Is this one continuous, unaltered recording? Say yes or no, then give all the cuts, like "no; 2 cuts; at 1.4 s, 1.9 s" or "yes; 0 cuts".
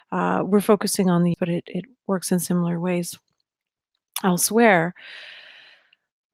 no; 1 cut; at 1.3 s